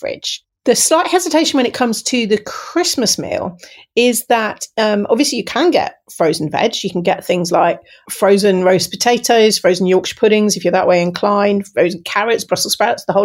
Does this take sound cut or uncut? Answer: uncut